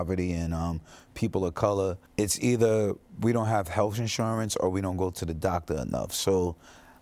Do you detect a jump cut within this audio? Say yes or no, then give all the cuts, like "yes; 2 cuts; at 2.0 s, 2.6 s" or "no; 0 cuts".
yes; 1 cut; at 2.1 s